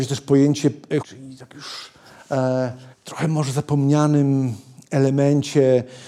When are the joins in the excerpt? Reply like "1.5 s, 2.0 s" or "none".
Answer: 1.0 s, 2.9 s